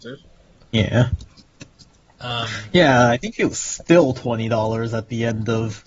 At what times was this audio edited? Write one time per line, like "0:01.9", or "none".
none